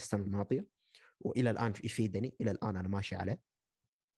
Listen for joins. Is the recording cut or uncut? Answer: uncut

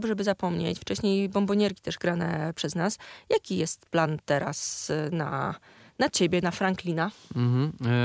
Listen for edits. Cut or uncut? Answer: uncut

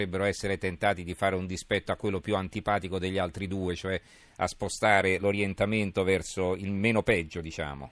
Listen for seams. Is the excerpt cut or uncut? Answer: uncut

